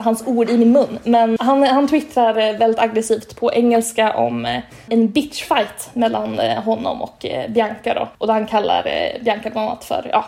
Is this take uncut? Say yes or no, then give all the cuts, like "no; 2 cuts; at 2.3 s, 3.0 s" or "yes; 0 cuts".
no; 3 cuts; at 1.4 s, 4.9 s, 8.1 s